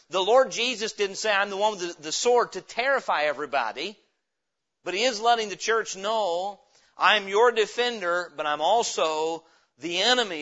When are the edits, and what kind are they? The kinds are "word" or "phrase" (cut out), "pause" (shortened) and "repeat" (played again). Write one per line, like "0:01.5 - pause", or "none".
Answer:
none